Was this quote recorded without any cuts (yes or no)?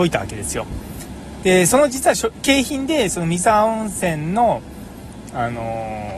yes